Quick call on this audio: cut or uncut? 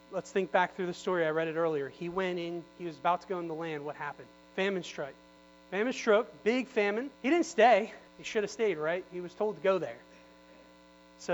cut